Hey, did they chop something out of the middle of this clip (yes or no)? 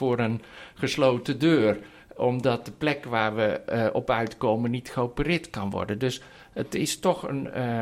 no